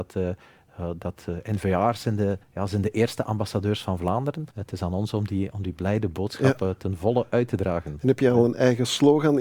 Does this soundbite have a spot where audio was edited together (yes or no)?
yes